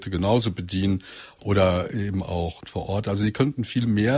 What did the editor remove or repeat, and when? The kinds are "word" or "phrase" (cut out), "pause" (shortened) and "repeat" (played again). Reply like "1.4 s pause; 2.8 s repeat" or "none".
2.6 s phrase